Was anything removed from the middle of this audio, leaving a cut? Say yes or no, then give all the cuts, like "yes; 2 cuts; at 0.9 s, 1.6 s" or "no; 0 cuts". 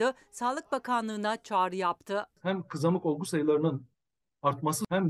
no; 0 cuts